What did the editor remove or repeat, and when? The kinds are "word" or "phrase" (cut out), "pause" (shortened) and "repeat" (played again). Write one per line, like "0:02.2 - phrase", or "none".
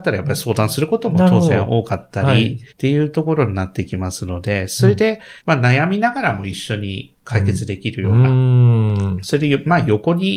0:02.7 - pause
0:05.4 - pause